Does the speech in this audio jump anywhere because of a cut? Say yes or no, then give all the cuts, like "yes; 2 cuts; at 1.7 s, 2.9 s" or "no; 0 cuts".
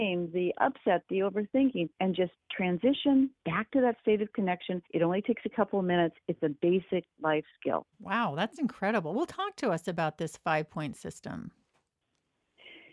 yes; 4 cuts; at 1.9 s, 3.4 s, 4.9 s, 7.9 s